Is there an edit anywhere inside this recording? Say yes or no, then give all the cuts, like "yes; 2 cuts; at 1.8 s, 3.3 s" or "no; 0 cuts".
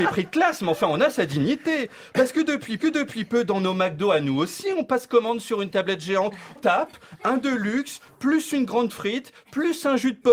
yes; 2 cuts; at 2.8 s, 6.6 s